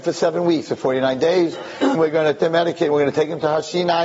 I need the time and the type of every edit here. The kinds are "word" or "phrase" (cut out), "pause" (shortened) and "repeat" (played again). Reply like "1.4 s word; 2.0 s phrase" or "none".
1.9 s word; 2.4 s word